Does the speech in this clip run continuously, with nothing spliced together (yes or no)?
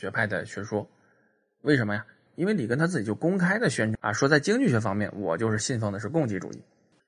yes